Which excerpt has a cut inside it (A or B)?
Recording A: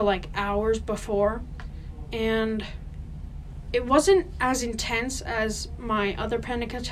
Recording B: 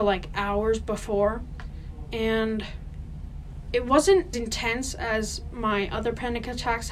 B